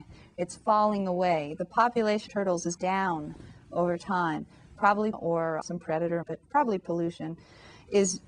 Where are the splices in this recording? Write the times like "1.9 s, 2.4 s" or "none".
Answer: 2.3 s, 2.8 s, 5.1 s, 5.6 s, 6.2 s